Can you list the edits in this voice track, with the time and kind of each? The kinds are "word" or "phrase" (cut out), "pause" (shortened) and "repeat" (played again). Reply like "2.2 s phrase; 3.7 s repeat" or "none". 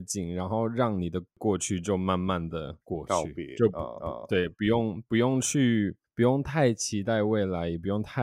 2.8 s pause; 4.0 s repeat; 6.0 s pause

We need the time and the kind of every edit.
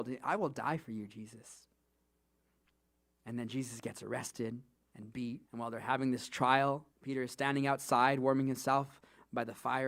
4.7 s pause; 5.5 s pause; 6.9 s pause

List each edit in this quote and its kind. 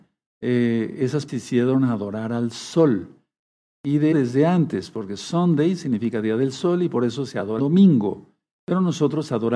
1.3 s word; 4.1 s word; 7.6 s word

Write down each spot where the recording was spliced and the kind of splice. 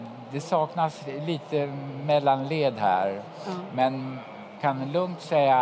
4.6 s word

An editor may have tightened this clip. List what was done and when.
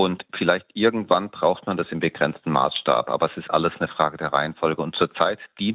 none

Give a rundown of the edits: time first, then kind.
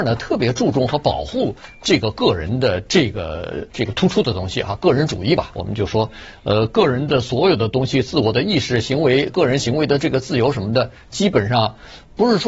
3.7 s pause; 9.3 s word

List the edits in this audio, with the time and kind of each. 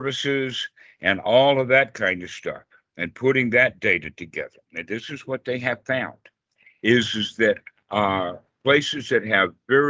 none

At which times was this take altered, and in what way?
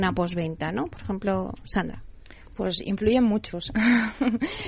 none

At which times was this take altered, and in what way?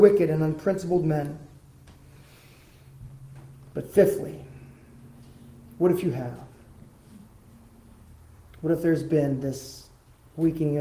none

